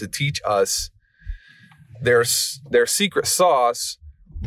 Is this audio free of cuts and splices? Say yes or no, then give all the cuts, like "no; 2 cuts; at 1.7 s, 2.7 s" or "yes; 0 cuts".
yes; 0 cuts